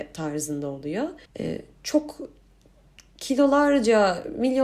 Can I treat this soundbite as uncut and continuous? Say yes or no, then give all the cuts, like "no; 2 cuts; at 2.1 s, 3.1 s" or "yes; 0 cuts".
no; 1 cut; at 1.3 s